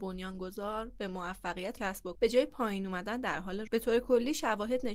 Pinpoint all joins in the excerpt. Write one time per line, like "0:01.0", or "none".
0:01.8
0:02.2
0:03.7